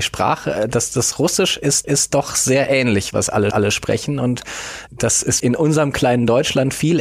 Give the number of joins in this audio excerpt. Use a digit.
5